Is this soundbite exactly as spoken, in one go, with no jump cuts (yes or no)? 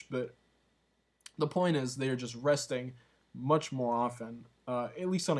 yes